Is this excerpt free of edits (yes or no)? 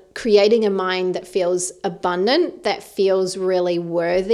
yes